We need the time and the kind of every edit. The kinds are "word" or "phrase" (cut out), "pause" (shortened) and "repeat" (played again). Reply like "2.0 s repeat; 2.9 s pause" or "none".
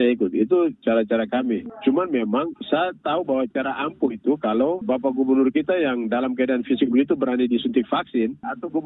none

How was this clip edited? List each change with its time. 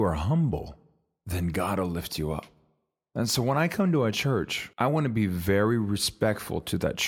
4.7 s pause

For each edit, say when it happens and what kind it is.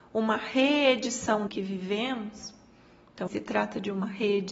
1.5 s word; 3.3 s word

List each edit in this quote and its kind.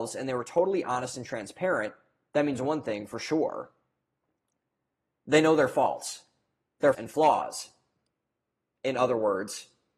6.9 s word

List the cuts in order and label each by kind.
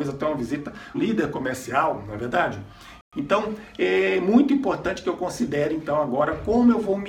0.9 s word; 3.1 s pause

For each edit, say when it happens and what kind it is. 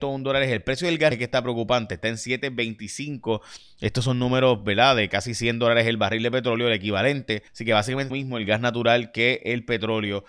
1.1 s word; 7.5 s pause; 8.1 s phrase

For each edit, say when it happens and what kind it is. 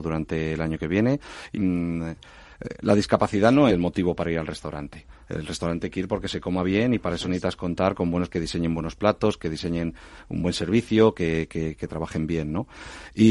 1.5 s phrase; 3.7 s word; 8.3 s word

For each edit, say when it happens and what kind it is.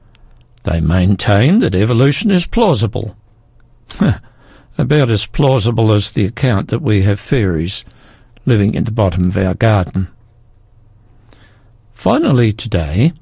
none

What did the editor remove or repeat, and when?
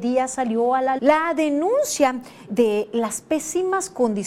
1.0 s word; 2.5 s word

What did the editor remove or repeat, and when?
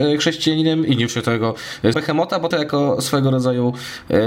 1.1 s word; 1.9 s word; 2.5 s word

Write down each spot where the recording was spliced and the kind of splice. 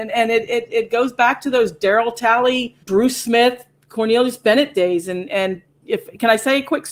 2.8 s pause

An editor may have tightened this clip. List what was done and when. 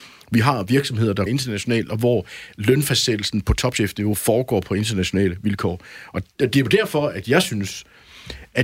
1.3 s word

